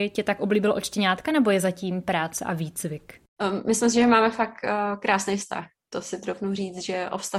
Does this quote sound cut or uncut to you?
uncut